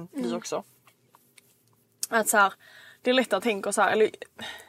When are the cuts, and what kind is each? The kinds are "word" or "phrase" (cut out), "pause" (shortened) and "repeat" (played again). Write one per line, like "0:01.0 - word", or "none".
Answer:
0:03.4 - word

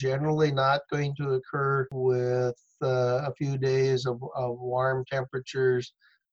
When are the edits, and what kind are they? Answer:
none

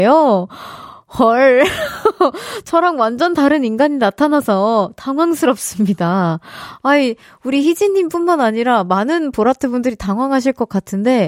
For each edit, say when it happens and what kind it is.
none

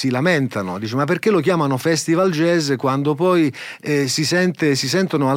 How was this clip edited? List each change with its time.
none

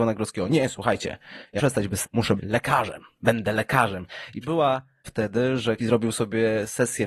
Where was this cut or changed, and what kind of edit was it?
0:01.6 - word
0:02.0 - word
0:02.4 - word
0:04.4 - word
0:05.0 - word
0:05.8 - word

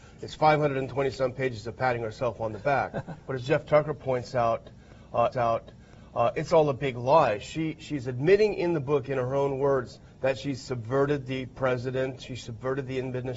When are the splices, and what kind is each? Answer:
0:03.2 - pause
0:05.3 - repeat
0:10.1 - pause

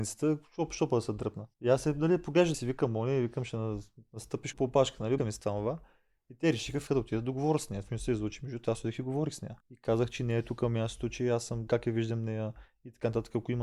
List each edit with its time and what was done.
0:01.5 - pause
0:02.5 - phrase
0:04.5 - word
0:05.2 - word
0:06.9 - phrase
0:07.9 - word
0:09.6 - pause
0:11.7 - phrase

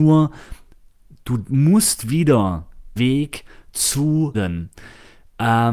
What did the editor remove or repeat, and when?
0:03.0 - word
0:04.3 - phrase

